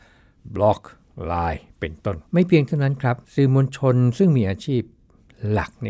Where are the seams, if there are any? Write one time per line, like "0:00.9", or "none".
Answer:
0:02.3
0:03.2

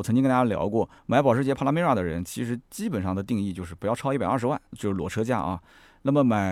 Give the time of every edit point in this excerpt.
0:01.0
0:04.7

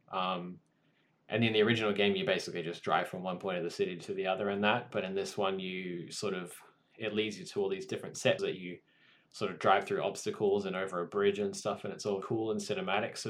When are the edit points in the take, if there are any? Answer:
0:08.4
0:12.2

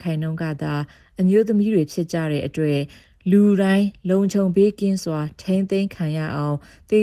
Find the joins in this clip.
none

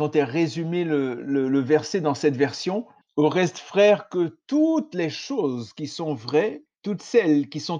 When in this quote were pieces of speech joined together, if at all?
0:03.0
0:06.7

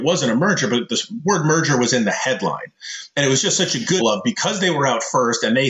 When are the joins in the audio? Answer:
0:04.0

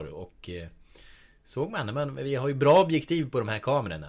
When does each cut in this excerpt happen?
none

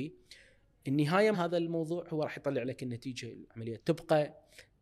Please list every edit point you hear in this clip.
0:01.3
0:03.8

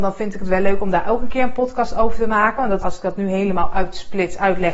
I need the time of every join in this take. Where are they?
0:02.8

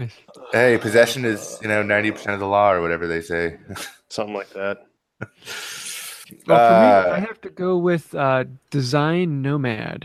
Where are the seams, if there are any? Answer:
none

